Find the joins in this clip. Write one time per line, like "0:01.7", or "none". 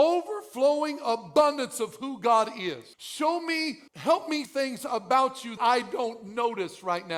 0:02.9
0:03.9
0:04.5
0:05.6